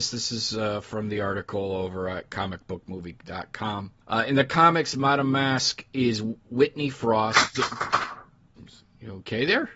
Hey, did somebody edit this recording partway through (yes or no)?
yes